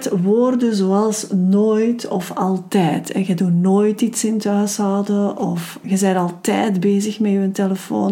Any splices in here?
yes; 1 cut; at 5.8 s

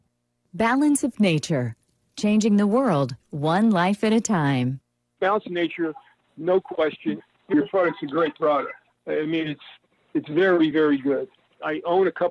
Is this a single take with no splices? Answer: yes; 0 cuts

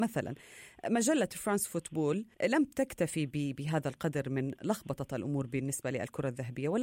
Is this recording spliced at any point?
yes; 1 cut; at 2.3 s

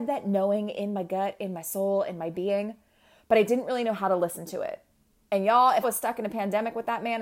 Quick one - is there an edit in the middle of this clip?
yes; 1 cut; at 5.8 s

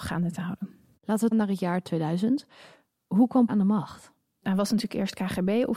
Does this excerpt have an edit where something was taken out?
yes; 2 cuts; at 1.3 s, 3.5 s

